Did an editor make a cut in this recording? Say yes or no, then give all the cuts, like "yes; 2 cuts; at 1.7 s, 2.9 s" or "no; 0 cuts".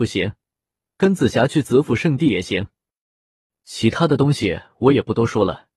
no; 0 cuts